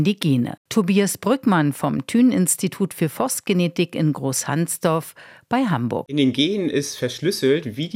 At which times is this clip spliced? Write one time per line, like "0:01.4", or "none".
none